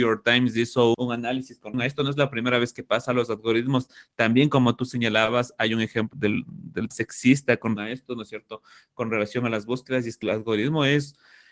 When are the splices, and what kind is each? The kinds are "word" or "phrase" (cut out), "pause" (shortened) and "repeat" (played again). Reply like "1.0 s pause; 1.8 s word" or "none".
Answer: 0.9 s word; 1.7 s word; 6.1 s word; 6.9 s word; 7.8 s word; 10.2 s word